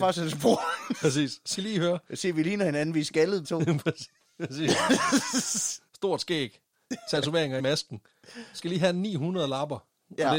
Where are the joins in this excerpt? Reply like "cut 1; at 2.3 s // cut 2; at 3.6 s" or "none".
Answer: cut 1; at 1.6 s // cut 2; at 3.4 s // cut 3; at 5.9 s // cut 4; at 7.6 s // cut 5; at 8.6 s